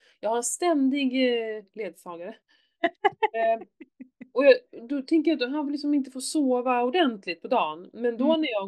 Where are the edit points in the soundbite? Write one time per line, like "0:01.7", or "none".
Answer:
0:02.4